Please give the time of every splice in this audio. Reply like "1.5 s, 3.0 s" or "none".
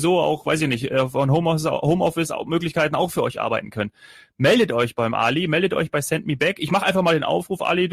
none

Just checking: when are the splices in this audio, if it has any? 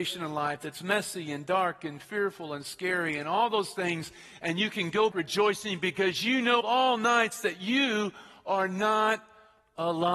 5.1 s, 6.6 s

